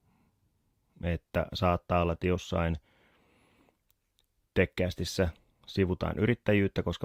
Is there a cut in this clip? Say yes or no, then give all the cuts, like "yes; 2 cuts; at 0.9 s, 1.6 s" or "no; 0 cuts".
no; 0 cuts